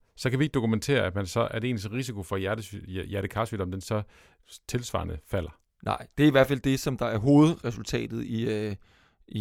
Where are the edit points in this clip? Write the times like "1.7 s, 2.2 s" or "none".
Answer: 5.6 s